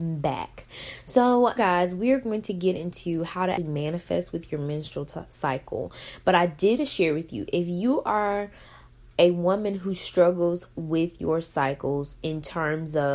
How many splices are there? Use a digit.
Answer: 3